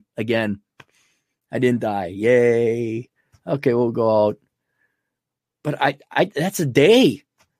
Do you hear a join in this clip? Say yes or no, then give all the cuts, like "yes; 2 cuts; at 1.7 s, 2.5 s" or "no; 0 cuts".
no; 0 cuts